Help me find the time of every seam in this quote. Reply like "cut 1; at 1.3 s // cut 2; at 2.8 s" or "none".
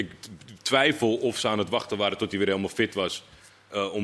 none